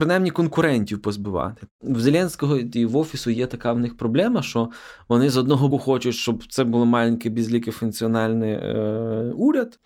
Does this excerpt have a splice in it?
yes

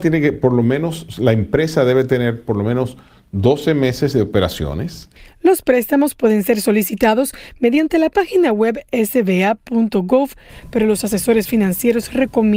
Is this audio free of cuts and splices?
yes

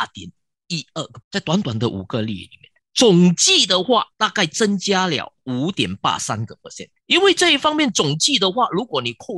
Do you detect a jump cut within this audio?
yes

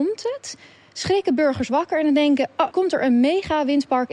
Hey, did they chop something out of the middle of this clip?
yes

